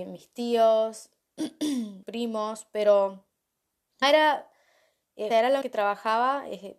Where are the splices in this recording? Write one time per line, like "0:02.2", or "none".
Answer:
0:02.0
0:04.0
0:05.3
0:05.6